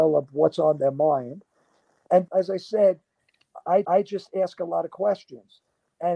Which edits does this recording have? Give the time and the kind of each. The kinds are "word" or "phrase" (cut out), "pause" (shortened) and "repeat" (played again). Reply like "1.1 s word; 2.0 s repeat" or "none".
2.3 s word; 3.8 s repeat